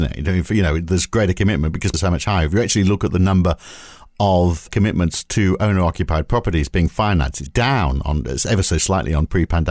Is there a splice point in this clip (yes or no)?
yes